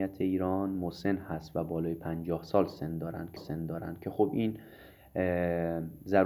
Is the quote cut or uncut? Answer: cut